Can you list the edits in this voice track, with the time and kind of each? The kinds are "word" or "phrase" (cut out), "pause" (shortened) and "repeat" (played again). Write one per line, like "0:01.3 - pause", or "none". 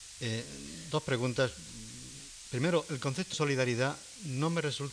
0:03.3 - word